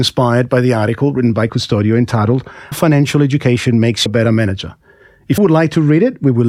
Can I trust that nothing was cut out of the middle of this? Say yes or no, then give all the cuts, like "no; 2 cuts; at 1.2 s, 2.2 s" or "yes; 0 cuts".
no; 4 cuts; at 1.5 s, 2.7 s, 4.1 s, 5.4 s